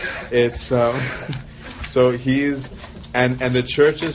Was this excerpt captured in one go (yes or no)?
yes